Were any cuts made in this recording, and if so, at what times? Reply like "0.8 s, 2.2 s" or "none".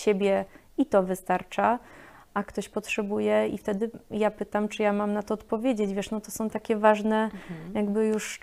none